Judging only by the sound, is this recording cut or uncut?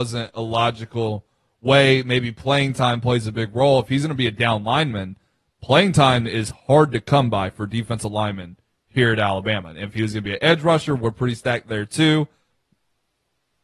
uncut